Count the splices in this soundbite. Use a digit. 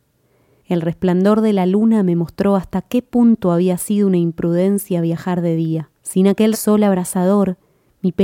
2